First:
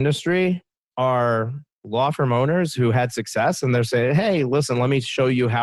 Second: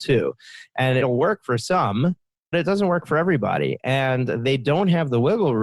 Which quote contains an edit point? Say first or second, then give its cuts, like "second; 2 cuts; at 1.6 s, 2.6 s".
second; 2 cuts; at 1.0 s, 2.5 s